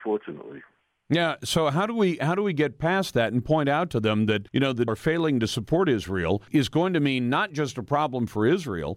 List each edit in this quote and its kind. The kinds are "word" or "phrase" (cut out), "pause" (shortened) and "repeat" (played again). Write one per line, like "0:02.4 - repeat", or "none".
0:04.5 - pause
0:04.9 - phrase
0:06.5 - word